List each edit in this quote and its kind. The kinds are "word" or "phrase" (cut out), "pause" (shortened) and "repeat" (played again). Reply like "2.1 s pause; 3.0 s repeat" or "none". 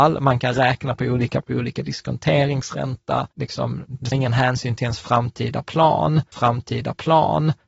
1.4 s phrase; 3.3 s pause; 4.1 s word; 6.3 s repeat